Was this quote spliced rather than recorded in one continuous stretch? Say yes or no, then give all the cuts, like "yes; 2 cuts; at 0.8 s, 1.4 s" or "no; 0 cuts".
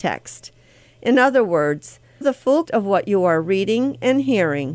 yes; 2 cuts; at 2.2 s, 2.6 s